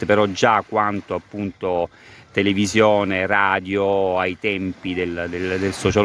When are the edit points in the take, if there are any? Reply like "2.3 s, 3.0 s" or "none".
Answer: none